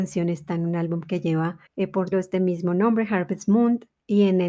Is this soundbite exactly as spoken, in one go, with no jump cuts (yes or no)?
no